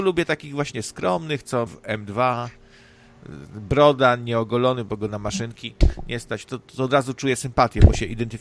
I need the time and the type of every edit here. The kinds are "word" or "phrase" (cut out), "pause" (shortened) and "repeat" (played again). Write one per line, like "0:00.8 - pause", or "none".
0:01.7 - word